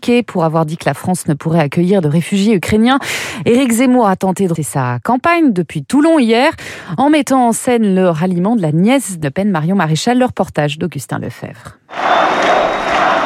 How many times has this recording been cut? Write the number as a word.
two